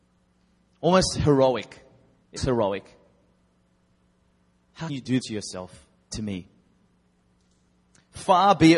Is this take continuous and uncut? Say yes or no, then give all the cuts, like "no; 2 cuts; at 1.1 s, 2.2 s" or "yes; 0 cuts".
no; 4 cuts; at 2.4 s, 4.9 s, 5.2 s, 6.1 s